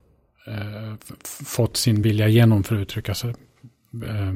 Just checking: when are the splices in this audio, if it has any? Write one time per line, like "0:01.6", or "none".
none